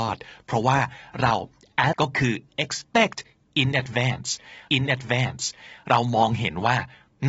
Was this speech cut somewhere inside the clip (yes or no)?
yes